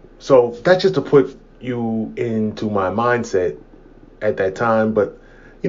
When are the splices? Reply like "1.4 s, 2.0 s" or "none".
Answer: none